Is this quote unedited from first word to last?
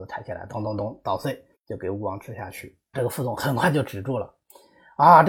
no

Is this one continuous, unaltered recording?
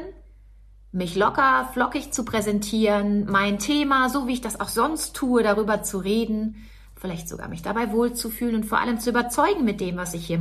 yes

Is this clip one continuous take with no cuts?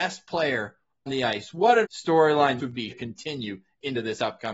no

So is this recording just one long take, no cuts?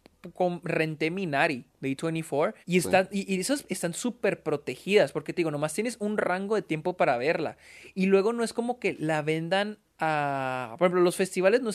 no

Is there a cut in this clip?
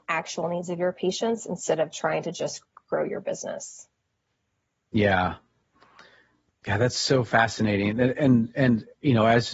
no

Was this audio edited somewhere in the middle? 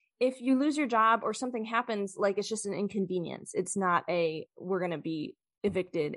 no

